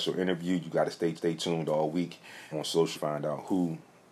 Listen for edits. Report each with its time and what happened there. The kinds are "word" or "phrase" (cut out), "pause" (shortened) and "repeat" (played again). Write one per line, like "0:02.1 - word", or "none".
0:01.2 - repeat
0:02.5 - word
0:02.9 - phrase

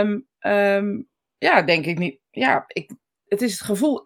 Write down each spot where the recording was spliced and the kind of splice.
none

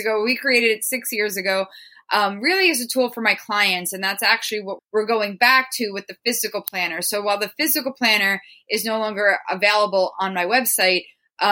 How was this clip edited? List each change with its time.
0:04.8 - word

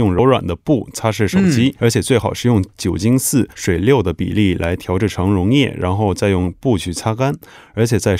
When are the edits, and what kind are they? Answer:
0:01.8 - word
0:03.5 - pause

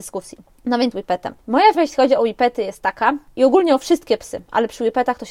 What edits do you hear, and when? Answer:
0:00.9 - phrase
0:01.7 - word

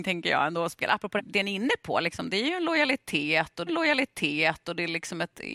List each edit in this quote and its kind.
0:01.2 - phrase
0:03.7 - repeat

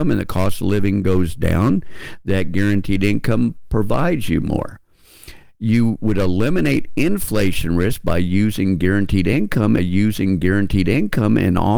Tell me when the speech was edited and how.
0:09.8 - repeat

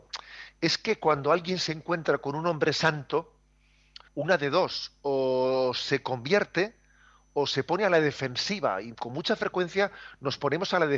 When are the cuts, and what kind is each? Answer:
0:04.1 - pause

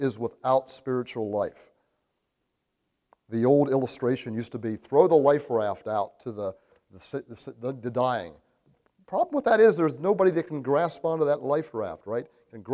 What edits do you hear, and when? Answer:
none

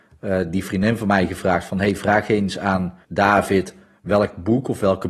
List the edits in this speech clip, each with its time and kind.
0:03.0 - pause

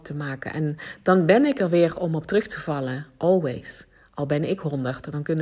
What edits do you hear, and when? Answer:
none

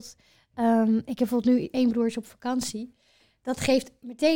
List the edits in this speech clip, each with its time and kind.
none

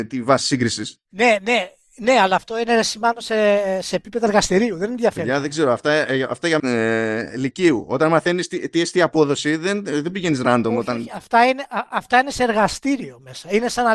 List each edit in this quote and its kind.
0:01.1 - pause
0:06.6 - phrase

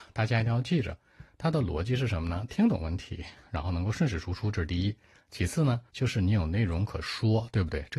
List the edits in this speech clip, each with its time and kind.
0:05.9 - pause

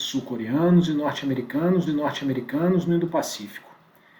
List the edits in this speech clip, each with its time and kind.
0:01.9 - repeat

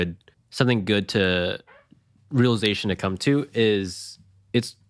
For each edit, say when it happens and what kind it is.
none

